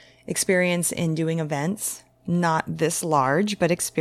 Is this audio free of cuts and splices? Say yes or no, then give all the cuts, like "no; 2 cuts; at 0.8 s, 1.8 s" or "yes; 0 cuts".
yes; 0 cuts